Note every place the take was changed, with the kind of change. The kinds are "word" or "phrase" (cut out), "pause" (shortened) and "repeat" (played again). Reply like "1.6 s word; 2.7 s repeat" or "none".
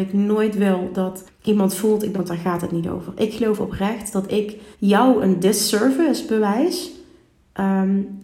1.3 s pause; 2.1 s phrase; 4.7 s pause